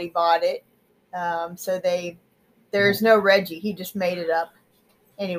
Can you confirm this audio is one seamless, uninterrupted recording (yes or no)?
yes